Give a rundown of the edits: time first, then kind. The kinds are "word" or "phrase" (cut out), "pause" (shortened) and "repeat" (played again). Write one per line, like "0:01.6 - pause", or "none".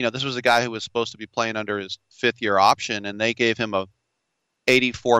none